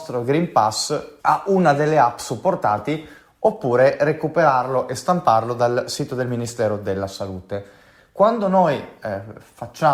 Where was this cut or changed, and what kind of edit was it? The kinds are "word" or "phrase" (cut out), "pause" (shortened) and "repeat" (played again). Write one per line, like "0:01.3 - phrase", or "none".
0:01.2 - pause

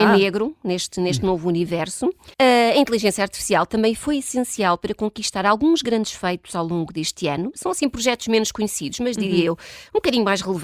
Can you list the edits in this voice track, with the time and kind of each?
0:02.3 - pause

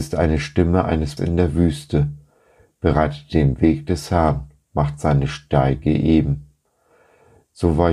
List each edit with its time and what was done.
0:01.2 - word

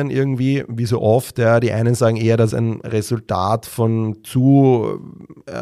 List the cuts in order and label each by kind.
0:02.5 - word

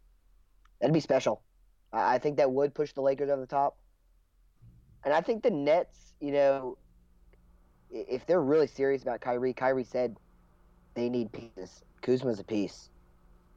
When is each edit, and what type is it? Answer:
0:11.9 - pause

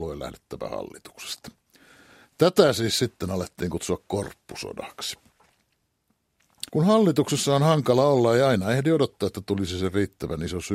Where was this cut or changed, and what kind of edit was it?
0:06.7 - pause

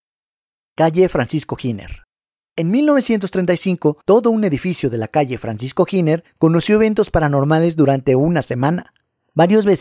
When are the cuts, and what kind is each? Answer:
0:04.0 - pause

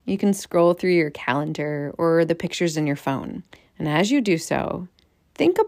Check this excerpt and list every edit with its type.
0:03.5 - pause

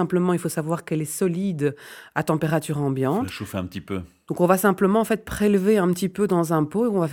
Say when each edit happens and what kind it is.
none

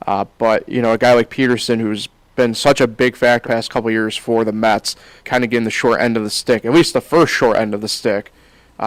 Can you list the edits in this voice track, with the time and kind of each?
0:03.4 - word
0:05.2 - word

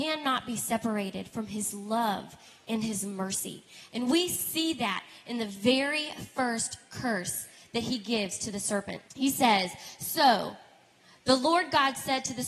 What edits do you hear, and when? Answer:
0:09.1 - pause

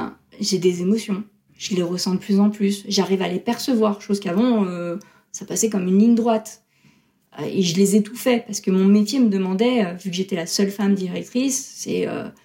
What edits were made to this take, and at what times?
none

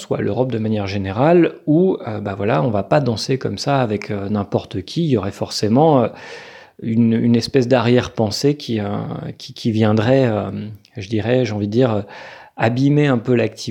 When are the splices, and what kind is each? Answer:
none

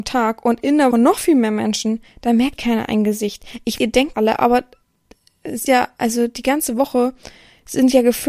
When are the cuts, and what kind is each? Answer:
0:00.9 - word
0:02.6 - word
0:03.8 - word
0:04.1 - word
0:05.7 - word

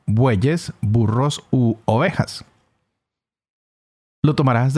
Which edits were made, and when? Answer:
none

